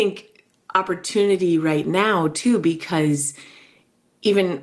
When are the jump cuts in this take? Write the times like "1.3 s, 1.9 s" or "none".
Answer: none